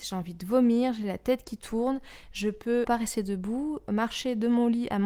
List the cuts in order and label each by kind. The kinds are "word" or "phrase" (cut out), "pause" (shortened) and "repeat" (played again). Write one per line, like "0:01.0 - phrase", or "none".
0:02.8 - word

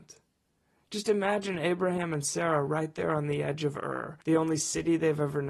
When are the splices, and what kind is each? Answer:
0:04.2 - pause

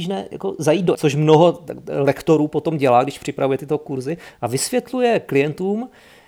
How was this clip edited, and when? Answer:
0:00.9 - word

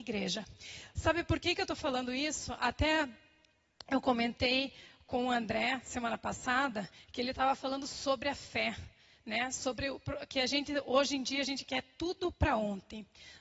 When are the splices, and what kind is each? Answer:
none

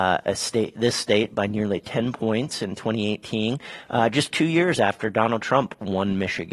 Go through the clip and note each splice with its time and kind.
none

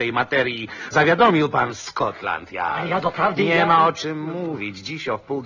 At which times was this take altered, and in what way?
0:00.9 - word

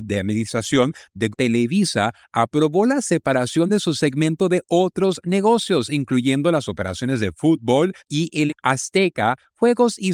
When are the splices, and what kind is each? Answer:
0:01.3 - word
0:08.0 - pause
0:08.5 - word

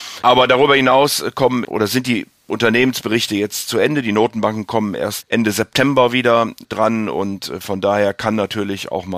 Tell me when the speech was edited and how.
0:01.6 - word
0:05.2 - word

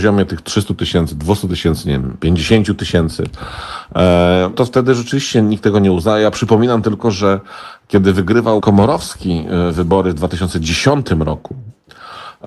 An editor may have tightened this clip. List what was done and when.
0:04.5 - word
0:08.6 - word

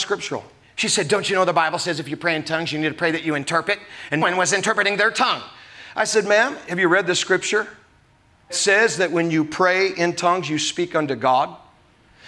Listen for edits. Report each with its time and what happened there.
0:04.2 - word
0:08.5 - word

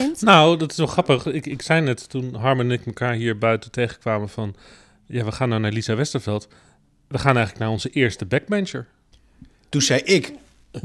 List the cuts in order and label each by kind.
none

